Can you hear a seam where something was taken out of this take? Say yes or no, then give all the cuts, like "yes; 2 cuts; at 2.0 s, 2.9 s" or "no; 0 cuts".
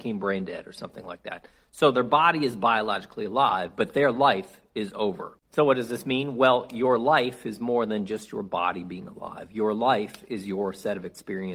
yes; 1 cut; at 5.4 s